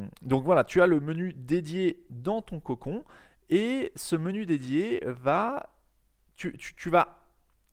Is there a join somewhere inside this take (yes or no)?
no